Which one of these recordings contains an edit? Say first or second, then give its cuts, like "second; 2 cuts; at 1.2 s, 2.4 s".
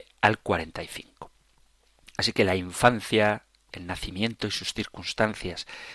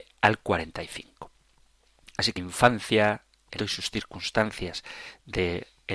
second; 2 cuts; at 2.4 s, 3.6 s